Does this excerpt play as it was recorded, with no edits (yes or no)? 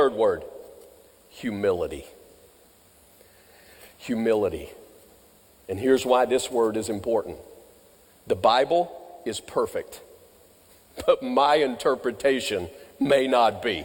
yes